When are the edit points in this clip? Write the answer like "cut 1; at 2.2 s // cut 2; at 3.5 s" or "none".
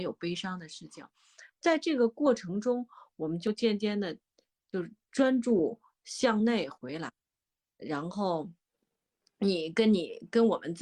none